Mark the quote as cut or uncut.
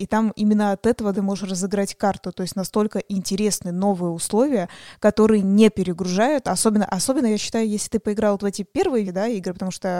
cut